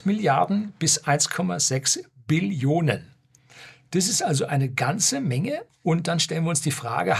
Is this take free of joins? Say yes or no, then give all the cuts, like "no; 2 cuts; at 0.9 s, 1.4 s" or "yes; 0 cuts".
no; 1 cut; at 5.7 s